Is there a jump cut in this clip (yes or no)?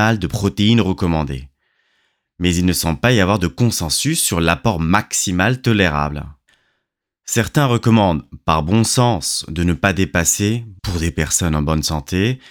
yes